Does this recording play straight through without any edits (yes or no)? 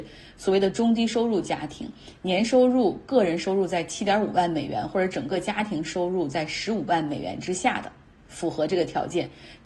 yes